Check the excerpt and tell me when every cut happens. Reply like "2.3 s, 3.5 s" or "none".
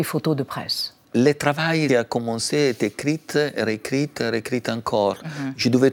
1.0 s, 1.9 s